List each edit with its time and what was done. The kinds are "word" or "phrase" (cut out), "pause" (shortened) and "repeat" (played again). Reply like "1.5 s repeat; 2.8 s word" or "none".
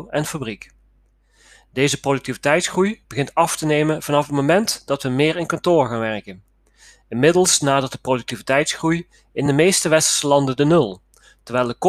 none

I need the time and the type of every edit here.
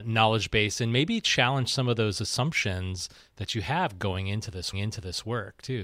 4.7 s repeat

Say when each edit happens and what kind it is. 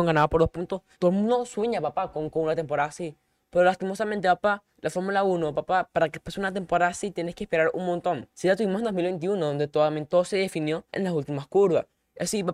0.9 s pause; 4.7 s pause; 8.3 s pause; 10.9 s pause

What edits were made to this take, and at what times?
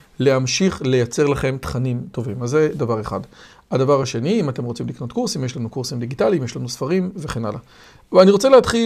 none

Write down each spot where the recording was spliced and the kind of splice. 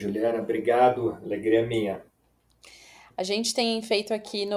none

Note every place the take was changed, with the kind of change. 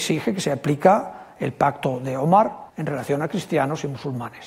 2.7 s pause

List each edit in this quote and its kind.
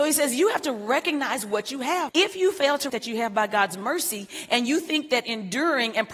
2.1 s word; 2.9 s phrase

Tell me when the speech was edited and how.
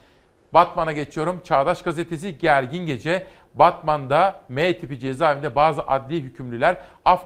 none

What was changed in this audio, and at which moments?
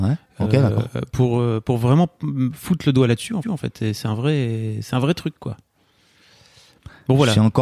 3.4 s repeat

